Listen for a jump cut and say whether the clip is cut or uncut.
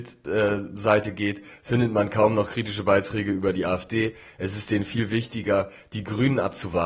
uncut